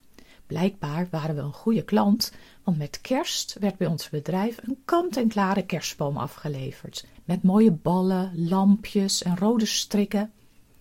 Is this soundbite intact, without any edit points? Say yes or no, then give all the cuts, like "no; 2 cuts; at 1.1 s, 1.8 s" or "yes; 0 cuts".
yes; 0 cuts